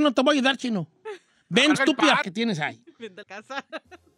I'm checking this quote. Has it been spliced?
yes; 3 cuts; at 1.7 s, 2.2 s, 3.2 s

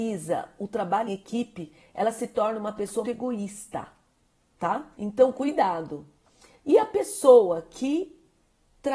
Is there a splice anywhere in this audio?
yes; 3 cuts; at 1.1 s, 3.0 s, 4.9 s

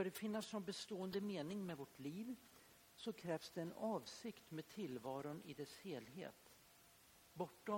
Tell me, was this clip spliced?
no; 0 cuts

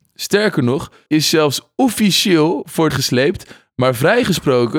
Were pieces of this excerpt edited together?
yes; 2 cuts; at 1.1 s, 2.9 s

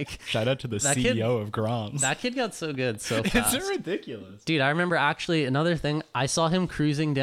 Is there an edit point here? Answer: no; 0 cuts

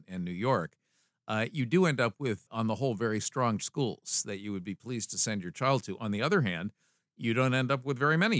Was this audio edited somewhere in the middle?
yes; 1 cut; at 3.6 s

